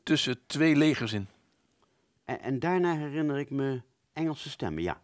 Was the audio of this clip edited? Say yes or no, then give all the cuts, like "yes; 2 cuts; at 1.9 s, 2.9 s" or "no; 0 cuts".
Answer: no; 0 cuts